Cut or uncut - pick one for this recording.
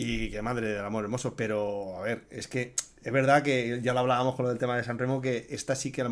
uncut